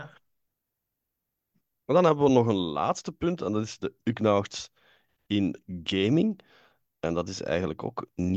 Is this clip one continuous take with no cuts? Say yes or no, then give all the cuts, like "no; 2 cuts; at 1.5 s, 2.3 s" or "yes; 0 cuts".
yes; 0 cuts